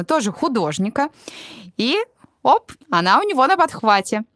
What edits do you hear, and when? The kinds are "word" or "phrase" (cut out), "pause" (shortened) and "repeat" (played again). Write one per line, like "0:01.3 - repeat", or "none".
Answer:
0:02.8 - pause